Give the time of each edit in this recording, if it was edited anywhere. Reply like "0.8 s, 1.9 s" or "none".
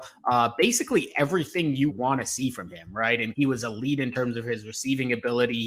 1.9 s, 3.3 s